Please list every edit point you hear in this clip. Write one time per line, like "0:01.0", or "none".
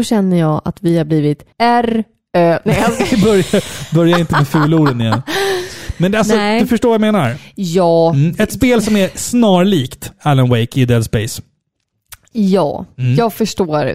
0:01.5